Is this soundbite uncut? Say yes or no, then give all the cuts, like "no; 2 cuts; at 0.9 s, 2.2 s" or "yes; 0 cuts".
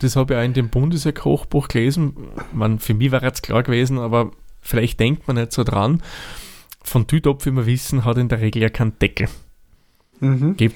yes; 0 cuts